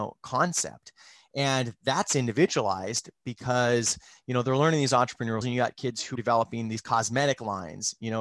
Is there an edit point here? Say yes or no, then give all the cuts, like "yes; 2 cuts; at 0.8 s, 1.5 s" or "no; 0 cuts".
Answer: yes; 2 cuts; at 5.4 s, 6.1 s